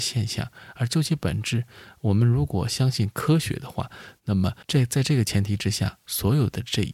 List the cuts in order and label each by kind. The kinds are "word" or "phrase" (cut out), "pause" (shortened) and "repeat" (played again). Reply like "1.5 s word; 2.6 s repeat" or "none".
4.6 s pause